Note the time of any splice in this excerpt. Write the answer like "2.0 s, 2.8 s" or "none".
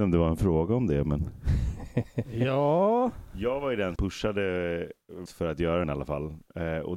4.0 s, 5.3 s, 5.8 s